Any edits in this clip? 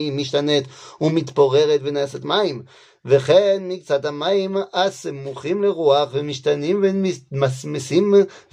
no; 0 cuts

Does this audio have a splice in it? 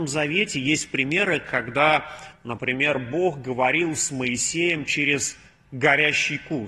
no; 0 cuts

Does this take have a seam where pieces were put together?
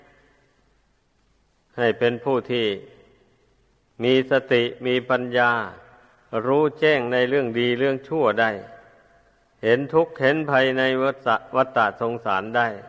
no; 0 cuts

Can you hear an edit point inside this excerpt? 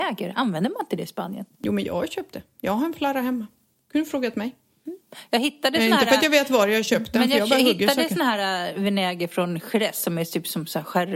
no; 0 cuts

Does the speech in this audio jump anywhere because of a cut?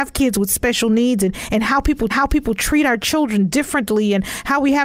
yes; 1 cut; at 2.1 s

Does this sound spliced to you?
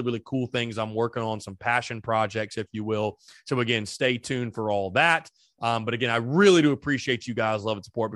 no; 0 cuts

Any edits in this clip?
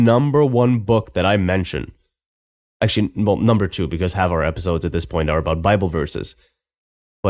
no; 0 cuts

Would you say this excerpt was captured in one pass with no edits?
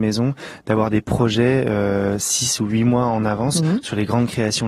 yes; 0 cuts

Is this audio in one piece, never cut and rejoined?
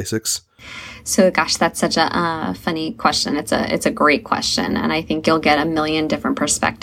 yes; 0 cuts

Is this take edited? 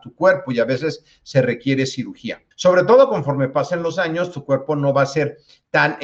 yes; 1 cut; at 2.5 s

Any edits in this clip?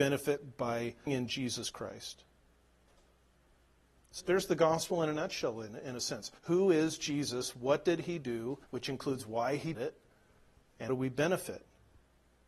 yes; 6 cuts; at 1.1 s, 4.2 s, 6.4 s, 8.6 s, 9.7 s, 10.9 s

